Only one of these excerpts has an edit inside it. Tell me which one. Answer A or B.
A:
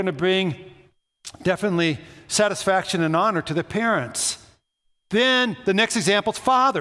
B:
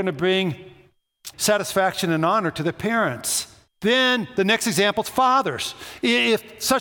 B